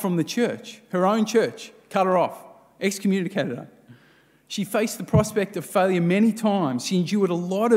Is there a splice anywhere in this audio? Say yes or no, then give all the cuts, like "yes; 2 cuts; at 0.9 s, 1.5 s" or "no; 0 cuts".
no; 0 cuts